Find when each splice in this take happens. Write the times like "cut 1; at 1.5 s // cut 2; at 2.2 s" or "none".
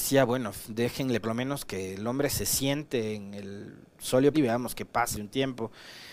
cut 1; at 1.2 s // cut 2; at 4.3 s // cut 3; at 5.1 s